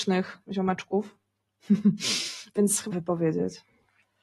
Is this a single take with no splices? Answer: no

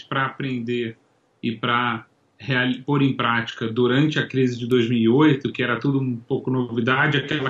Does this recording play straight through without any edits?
yes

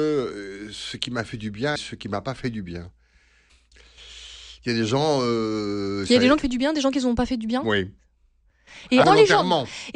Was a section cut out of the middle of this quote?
yes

